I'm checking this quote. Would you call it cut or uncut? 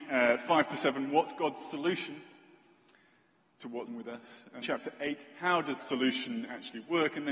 cut